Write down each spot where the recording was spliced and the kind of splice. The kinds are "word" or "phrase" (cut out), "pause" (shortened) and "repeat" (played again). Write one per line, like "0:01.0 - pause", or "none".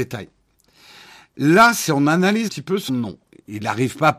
0:02.5 - word
0:02.9 - word